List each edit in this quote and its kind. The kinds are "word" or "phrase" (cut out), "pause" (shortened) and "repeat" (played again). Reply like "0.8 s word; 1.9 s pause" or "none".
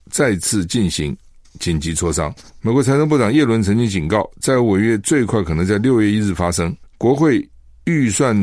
6.9 s pause